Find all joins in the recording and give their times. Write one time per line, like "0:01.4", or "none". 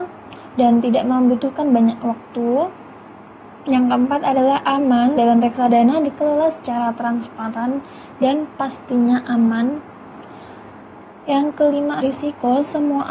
0:05.2
0:12.0